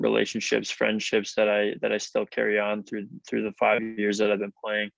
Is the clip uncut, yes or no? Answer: yes